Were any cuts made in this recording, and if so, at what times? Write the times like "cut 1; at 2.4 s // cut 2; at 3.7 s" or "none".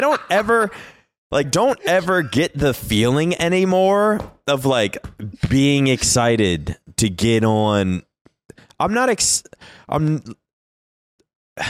cut 1; at 1.4 s